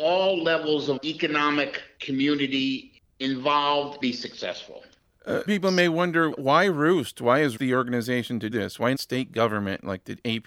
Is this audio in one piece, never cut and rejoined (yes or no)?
no